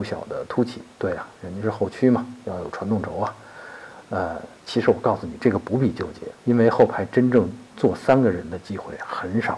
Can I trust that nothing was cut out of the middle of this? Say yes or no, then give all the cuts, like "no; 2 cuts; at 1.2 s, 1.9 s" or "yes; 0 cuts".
no; 2 cuts; at 4.6 s, 6.4 s